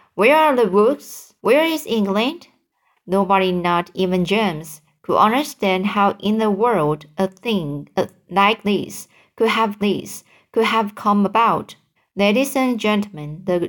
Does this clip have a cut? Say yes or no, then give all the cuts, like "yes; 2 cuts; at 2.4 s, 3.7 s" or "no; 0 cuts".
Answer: yes; 3 cuts; at 1.4 s, 9.8 s, 12.0 s